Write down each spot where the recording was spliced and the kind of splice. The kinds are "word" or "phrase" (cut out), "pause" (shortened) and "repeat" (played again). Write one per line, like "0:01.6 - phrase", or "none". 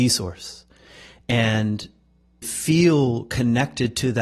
0:02.4 - word